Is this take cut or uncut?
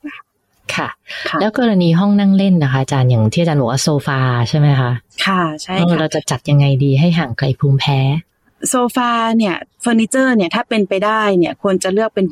uncut